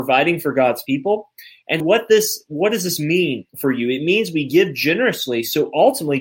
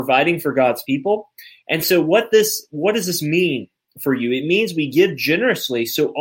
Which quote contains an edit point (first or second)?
first